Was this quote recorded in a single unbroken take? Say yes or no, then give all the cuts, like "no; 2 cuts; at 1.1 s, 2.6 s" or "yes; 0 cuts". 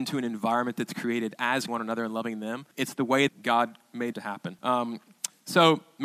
no; 5 cuts; at 1.7 s, 2.7 s, 3.3 s, 4.1 s, 4.6 s